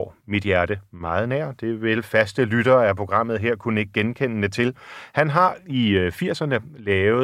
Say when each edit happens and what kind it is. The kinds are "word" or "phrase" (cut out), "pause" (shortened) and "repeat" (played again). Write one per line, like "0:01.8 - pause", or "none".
none